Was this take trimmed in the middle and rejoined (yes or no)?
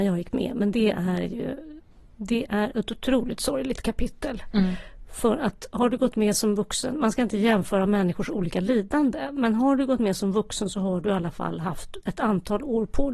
no